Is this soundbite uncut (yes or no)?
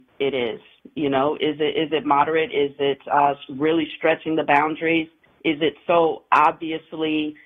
yes